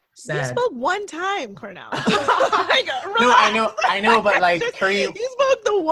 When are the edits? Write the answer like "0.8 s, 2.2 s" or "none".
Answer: none